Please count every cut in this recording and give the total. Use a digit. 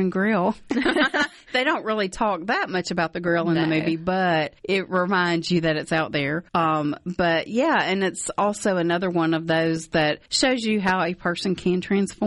3